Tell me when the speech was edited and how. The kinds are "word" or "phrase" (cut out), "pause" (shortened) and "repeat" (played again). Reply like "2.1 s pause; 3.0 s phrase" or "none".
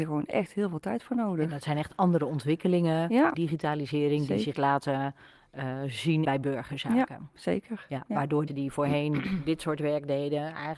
3.3 s phrase; 4.5 s phrase; 6.2 s phrase; 8.1 s pause; 8.5 s word